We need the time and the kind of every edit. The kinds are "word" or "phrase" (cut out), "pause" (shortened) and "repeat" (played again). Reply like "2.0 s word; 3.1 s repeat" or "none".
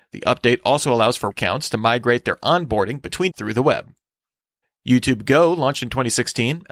1.3 s word; 3.3 s word; 4.6 s pause

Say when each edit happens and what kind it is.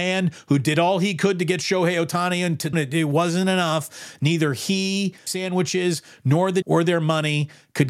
2.7 s word; 5.3 s word; 6.6 s word

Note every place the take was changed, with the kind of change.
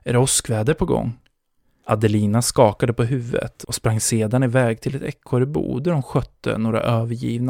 none

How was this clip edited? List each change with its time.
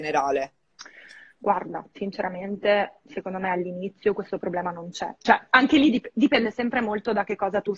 1.9 s word

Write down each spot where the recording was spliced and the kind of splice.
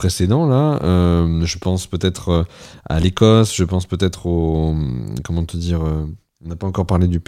none

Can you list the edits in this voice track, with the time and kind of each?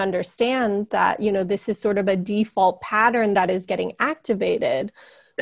none

